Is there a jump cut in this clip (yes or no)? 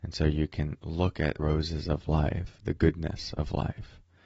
yes